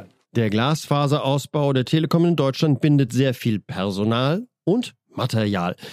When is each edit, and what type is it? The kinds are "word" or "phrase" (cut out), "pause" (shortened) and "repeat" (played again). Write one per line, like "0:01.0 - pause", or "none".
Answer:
none